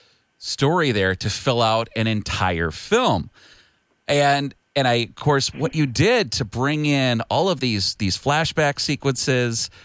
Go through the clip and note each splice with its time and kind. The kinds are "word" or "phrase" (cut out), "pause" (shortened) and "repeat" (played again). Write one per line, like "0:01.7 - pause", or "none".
none